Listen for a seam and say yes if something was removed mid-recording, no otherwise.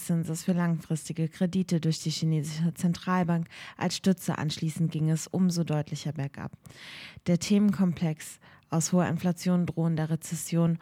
no